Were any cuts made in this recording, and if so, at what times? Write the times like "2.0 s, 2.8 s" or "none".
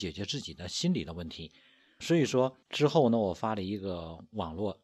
2.0 s, 2.6 s